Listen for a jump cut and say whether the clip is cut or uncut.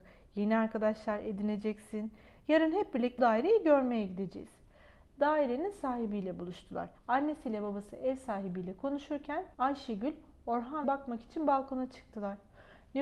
cut